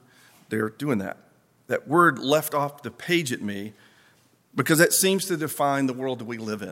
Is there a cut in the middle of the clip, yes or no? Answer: no